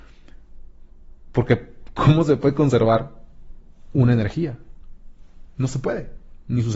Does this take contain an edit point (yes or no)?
no